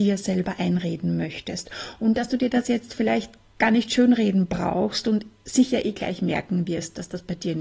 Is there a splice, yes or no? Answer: no